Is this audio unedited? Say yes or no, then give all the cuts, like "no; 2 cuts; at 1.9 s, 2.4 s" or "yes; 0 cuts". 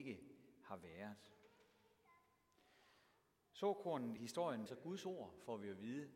no; 2 cuts; at 4.2 s, 4.7 s